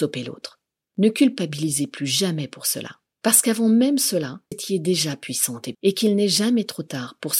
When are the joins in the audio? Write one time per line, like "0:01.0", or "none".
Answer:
0:04.5
0:05.7